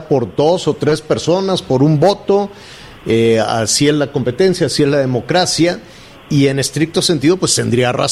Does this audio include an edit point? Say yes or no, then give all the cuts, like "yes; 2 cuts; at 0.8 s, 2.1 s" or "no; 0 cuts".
no; 0 cuts